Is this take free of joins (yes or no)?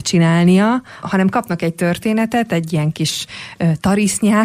no